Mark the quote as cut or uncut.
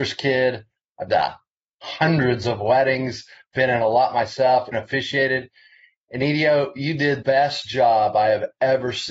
cut